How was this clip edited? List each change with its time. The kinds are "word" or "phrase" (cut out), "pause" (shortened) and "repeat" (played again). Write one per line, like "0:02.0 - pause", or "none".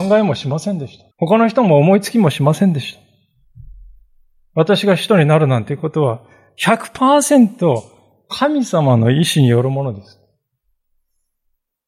0:01.1 - pause